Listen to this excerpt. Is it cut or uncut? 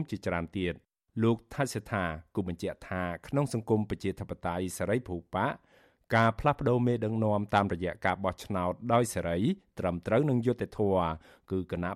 uncut